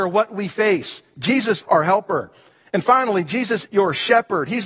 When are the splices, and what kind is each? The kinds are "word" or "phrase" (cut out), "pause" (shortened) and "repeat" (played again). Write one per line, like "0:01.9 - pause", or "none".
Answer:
0:01.6 - word
0:03.7 - word